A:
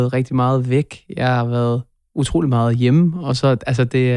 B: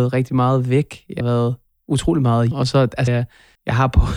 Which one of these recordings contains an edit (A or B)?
B